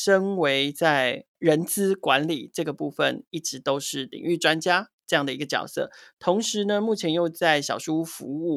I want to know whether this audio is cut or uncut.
uncut